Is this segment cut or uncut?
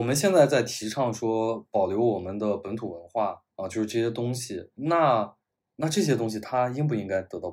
cut